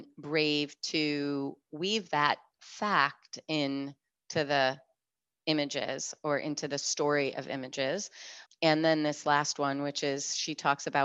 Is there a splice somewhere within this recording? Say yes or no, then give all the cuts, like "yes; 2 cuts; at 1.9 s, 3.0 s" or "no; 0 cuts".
yes; 1 cut; at 8.5 s